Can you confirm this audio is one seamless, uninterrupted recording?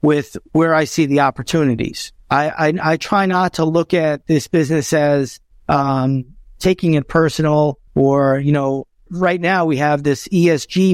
no; 4 cuts; at 2.2 s, 5.5 s, 7.9 s, 9.1 s

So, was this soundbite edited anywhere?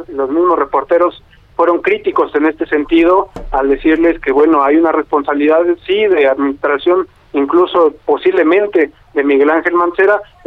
no; 0 cuts

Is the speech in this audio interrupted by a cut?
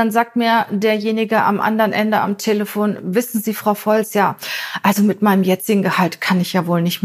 no; 0 cuts

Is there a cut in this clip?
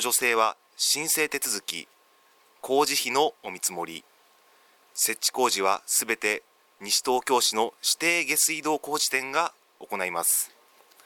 no; 0 cuts

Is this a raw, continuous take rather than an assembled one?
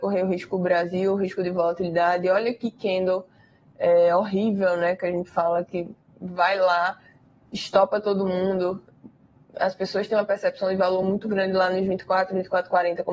yes; 0 cuts

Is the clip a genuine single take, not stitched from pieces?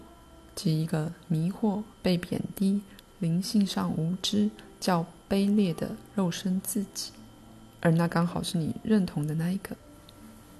no; 2 cuts; at 1.9 s, 7.7 s

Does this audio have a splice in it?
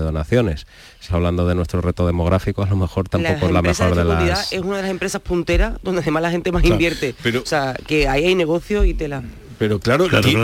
yes; 1 cut; at 1.1 s

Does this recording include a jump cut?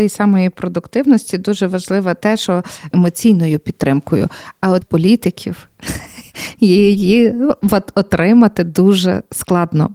yes; 2 cuts; at 2.9 s, 4.8 s

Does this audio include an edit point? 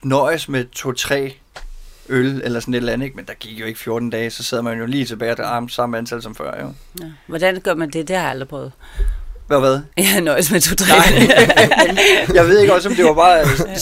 yes; 2 cuts; at 5.3 s, 9.9 s

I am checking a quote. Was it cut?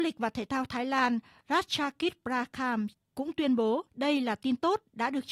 yes; 1 cut; at 3.9 s

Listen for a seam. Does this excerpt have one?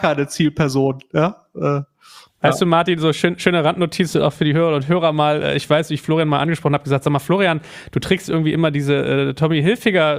no; 0 cuts

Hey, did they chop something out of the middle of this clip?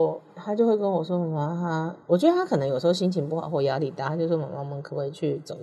yes; 1 cut; at 2.0 s

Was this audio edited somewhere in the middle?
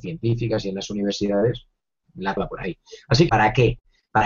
yes; 3 cuts; at 2.0 s, 2.4 s, 3.3 s

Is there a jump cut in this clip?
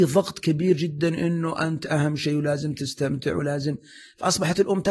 no; 0 cuts

